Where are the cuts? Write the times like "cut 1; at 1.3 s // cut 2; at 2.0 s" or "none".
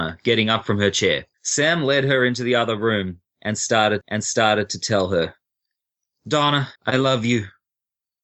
cut 1; at 1.3 s // cut 2; at 4.0 s // cut 3; at 6.8 s